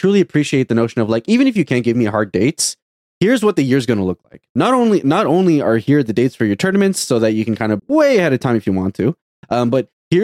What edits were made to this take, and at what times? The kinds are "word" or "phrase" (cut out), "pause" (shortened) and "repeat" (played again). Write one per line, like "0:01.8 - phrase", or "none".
0:07.8 - word